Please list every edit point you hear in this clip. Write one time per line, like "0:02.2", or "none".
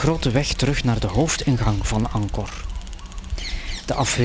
none